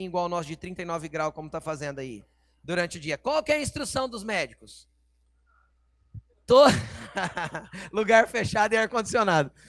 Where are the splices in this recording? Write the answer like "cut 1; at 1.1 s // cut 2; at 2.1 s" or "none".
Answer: cut 1; at 6.3 s

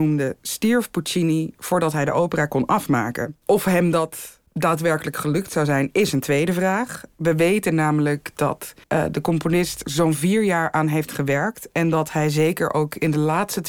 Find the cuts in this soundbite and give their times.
cut 1; at 3.4 s // cut 2; at 8.8 s // cut 3; at 9.8 s

